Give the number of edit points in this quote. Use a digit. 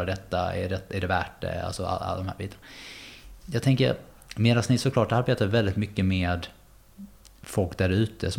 0